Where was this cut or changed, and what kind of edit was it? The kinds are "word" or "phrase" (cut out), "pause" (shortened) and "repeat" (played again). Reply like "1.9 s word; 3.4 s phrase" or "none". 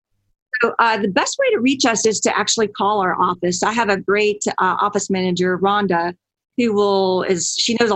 none